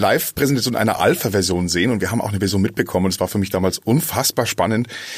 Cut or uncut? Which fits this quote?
uncut